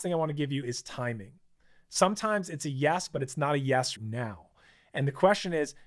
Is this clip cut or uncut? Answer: cut